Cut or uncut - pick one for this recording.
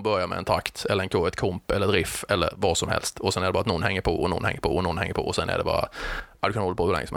uncut